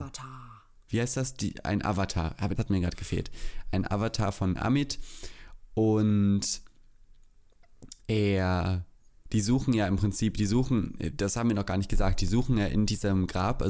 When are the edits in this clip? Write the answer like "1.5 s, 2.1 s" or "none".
2.6 s, 8.0 s